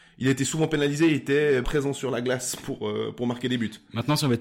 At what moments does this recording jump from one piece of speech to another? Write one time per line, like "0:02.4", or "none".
0:01.6